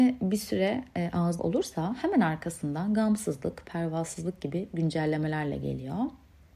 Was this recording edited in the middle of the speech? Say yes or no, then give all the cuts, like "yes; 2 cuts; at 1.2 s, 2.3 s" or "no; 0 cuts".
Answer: yes; 1 cut; at 1.4 s